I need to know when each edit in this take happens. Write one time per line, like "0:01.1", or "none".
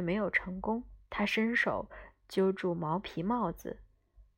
0:01.0